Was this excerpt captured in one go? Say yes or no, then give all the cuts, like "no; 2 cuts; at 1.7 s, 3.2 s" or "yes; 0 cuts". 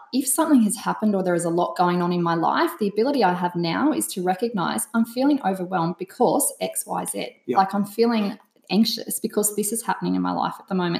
yes; 0 cuts